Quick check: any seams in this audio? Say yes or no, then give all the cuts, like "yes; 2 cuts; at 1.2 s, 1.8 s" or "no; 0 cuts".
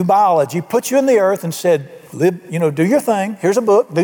yes; 1 cut; at 2.0 s